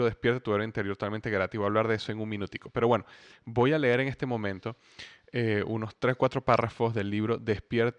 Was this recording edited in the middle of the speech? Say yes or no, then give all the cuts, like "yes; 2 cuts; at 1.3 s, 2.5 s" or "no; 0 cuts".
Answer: no; 0 cuts